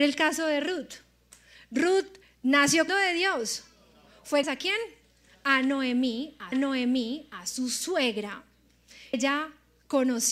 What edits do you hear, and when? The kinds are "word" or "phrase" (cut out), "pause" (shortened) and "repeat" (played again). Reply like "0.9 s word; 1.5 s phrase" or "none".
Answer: 2.9 s word; 4.4 s word; 6.5 s repeat; 9.1 s word